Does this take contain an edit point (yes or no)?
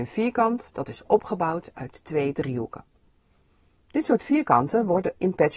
no